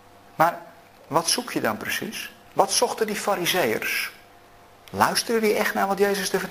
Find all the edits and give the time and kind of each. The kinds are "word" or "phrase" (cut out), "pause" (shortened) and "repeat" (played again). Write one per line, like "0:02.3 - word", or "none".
none